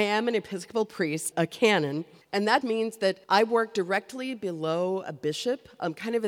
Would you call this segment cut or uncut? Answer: cut